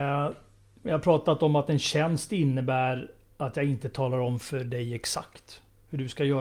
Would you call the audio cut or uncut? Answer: uncut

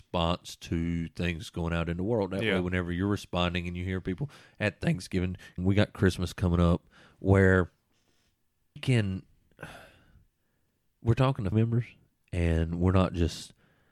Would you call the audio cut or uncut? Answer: cut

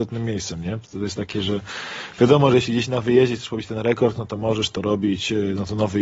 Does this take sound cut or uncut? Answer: uncut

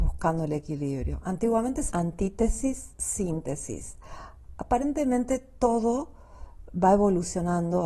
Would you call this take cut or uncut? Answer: cut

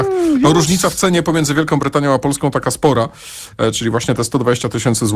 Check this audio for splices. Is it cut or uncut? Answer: uncut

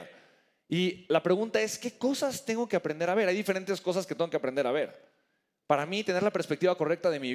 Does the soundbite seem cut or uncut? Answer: uncut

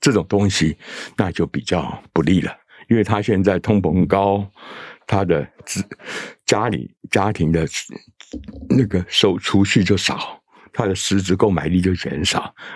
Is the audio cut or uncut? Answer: uncut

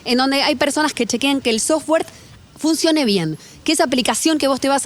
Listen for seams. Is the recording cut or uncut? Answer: uncut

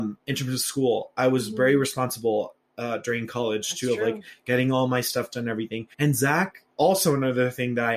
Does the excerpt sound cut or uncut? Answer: cut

